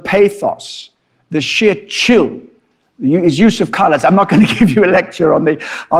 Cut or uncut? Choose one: uncut